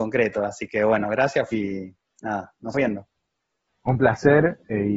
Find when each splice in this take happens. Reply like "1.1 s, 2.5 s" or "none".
1.5 s, 2.7 s